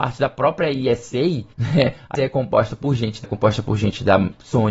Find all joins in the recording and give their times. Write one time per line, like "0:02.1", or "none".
0:02.1
0:03.2